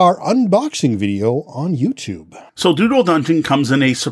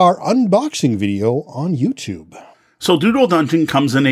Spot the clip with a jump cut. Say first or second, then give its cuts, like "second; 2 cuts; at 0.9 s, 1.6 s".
first; 1 cut; at 2.5 s